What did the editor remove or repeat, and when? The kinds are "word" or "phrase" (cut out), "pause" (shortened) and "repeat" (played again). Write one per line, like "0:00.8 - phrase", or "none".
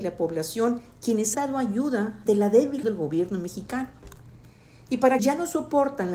0:01.3 - word
0:02.3 - word
0:02.8 - word
0:05.2 - word